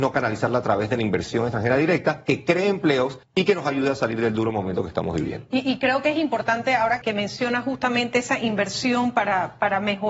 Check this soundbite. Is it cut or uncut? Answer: cut